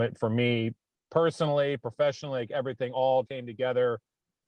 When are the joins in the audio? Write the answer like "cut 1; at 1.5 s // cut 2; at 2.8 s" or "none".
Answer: cut 1; at 3.2 s